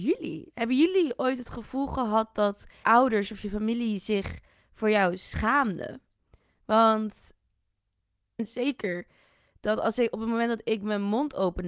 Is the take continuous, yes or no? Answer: no